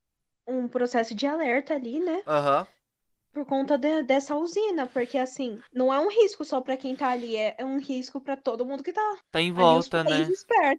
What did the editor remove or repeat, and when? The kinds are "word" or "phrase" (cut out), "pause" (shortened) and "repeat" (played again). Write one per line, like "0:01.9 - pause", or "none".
0:05.7 - pause
0:09.2 - pause